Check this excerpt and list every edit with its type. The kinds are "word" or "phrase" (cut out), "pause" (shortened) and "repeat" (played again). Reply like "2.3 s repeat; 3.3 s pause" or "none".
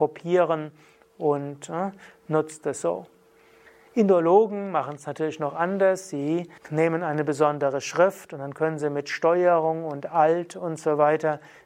6.6 s pause